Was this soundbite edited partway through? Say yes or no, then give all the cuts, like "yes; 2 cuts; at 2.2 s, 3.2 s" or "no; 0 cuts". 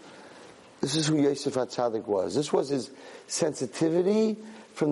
no; 0 cuts